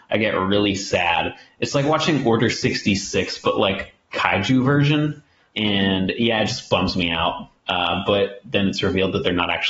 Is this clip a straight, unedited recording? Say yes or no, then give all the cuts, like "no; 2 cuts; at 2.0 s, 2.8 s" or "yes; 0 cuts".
yes; 0 cuts